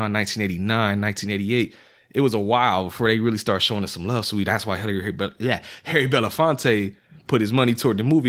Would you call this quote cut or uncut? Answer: uncut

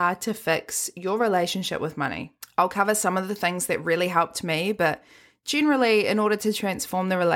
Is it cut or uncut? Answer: uncut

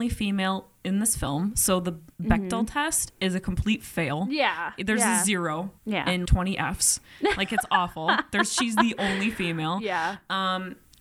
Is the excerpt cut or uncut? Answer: cut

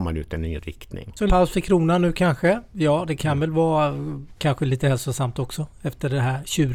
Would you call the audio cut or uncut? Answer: cut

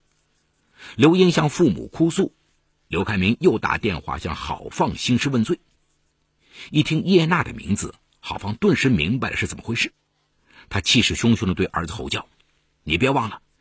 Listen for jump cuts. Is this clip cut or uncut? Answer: uncut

